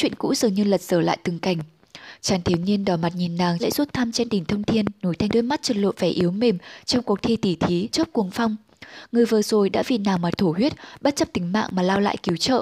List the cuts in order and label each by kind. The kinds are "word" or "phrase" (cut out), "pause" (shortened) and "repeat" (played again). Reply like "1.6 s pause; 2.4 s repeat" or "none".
3.6 s word; 5.3 s phrase; 7.9 s word